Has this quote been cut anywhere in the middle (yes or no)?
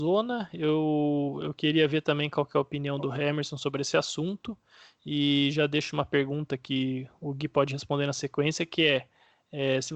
no